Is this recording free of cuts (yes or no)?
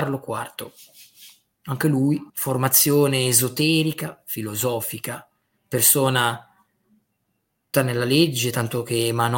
no